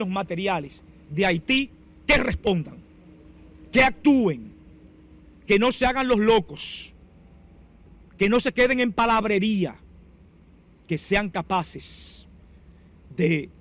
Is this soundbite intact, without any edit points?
yes; 0 cuts

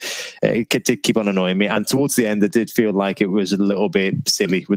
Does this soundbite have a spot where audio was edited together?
no; 0 cuts

